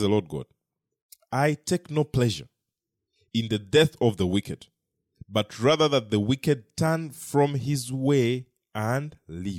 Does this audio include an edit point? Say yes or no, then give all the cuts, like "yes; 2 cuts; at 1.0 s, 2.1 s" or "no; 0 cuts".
no; 0 cuts